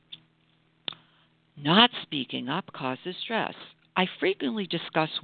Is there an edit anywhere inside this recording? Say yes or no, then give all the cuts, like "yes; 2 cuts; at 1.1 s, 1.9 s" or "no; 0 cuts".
no; 0 cuts